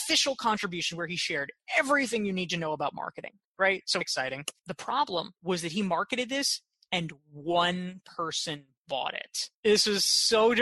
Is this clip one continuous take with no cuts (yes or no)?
no